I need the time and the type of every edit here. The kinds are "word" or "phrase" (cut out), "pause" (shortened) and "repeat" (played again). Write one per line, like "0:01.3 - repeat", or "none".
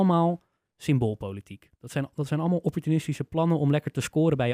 0:01.7 - pause